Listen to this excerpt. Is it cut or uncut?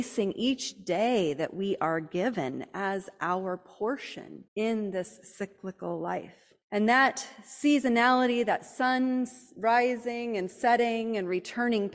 cut